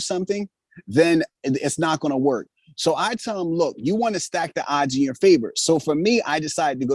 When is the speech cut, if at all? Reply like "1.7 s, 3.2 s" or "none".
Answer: none